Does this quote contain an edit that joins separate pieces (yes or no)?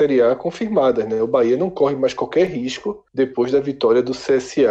yes